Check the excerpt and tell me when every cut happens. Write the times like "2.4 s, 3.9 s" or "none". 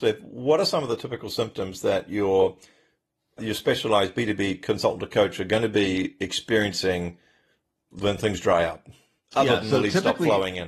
none